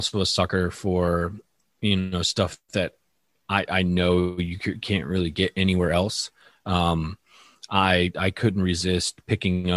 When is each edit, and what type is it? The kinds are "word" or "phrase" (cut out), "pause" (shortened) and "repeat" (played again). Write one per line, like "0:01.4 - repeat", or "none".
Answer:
none